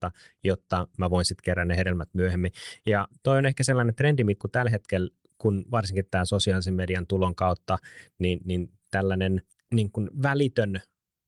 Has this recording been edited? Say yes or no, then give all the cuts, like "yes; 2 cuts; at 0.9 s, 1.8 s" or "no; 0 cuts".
yes; 2 cuts; at 4.4 s, 9.5 s